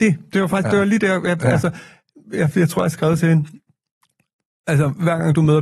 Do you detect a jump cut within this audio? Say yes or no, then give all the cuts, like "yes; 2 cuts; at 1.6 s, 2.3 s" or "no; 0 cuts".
no; 0 cuts